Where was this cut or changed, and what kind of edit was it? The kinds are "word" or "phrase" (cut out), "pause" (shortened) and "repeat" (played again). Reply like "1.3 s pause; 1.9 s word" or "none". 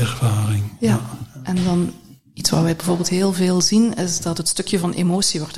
none